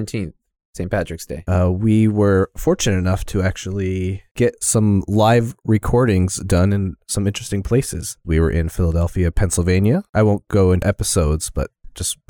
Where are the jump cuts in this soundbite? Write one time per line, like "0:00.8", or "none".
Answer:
0:10.8